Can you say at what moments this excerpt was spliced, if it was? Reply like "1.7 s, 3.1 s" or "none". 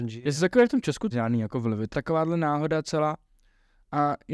1.1 s, 1.9 s